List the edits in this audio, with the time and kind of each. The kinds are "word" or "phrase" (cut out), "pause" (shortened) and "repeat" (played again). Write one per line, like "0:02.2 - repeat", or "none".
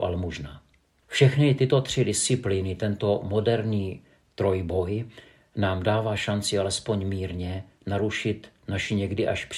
none